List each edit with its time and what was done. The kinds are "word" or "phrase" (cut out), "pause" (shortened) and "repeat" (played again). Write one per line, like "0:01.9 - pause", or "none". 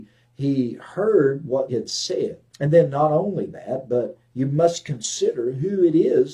0:01.7 - word
0:02.5 - pause